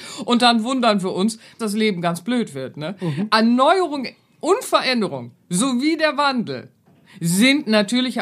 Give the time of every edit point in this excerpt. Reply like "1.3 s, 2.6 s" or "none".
1.6 s